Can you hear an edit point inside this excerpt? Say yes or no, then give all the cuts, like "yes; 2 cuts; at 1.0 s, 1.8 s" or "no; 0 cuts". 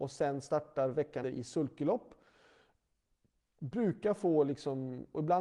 yes; 1 cut; at 1.2 s